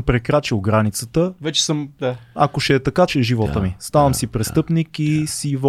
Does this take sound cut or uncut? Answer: cut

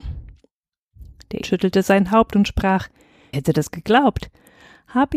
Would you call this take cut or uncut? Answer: cut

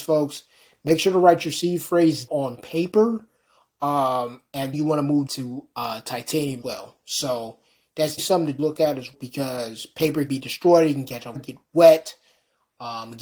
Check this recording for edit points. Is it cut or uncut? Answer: cut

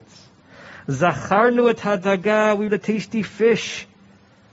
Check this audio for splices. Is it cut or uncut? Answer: cut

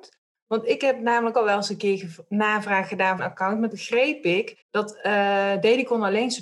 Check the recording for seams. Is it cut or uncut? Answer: cut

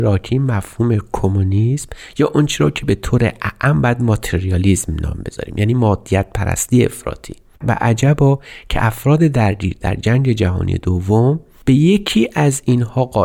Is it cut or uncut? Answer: uncut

